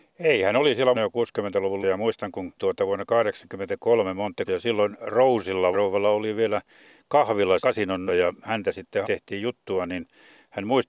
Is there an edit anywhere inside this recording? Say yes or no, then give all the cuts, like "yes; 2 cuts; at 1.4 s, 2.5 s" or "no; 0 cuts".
yes; 8 cuts; at 0.9 s, 1.8 s, 2.6 s, 4.5 s, 5.7 s, 7.6 s, 8.1 s, 9.0 s